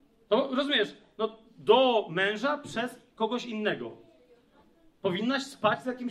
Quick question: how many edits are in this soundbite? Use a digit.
0